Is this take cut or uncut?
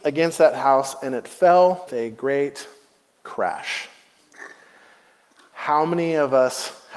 cut